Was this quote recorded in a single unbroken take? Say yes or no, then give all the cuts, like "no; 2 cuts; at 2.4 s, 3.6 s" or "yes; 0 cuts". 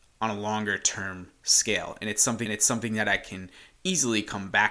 no; 1 cut; at 2.5 s